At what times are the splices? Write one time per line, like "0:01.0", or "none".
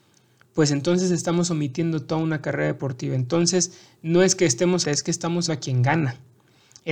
0:04.8
0:05.5